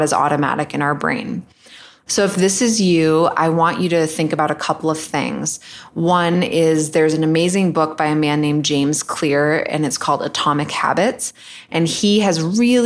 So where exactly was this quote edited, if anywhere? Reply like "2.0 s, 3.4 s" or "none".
none